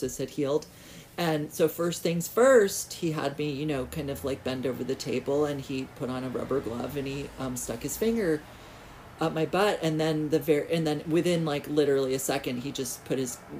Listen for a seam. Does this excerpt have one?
no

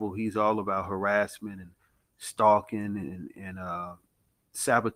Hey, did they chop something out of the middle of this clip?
no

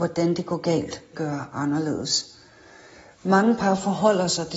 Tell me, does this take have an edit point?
yes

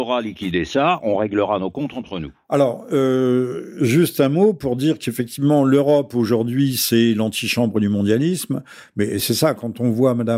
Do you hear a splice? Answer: no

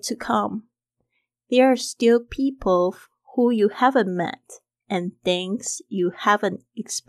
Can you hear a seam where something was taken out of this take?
no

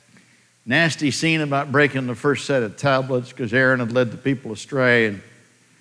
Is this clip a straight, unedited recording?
yes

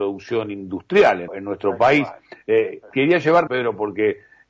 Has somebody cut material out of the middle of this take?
yes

